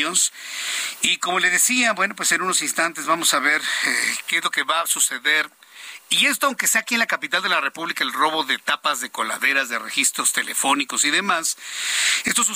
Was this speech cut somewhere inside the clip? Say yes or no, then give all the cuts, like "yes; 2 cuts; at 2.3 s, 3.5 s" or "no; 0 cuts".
no; 0 cuts